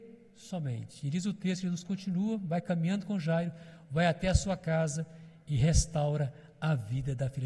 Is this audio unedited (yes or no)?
yes